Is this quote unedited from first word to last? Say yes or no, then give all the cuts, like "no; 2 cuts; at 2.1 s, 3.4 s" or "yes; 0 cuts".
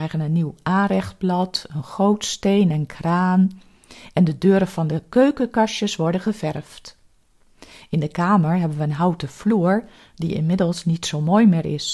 yes; 0 cuts